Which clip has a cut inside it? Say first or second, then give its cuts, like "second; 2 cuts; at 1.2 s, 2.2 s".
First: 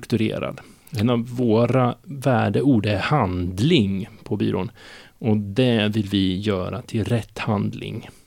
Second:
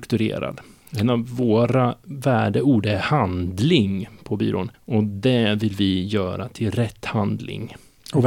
second; 1 cut; at 4.7 s